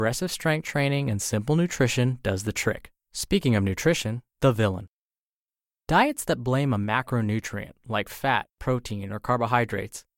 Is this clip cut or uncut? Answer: cut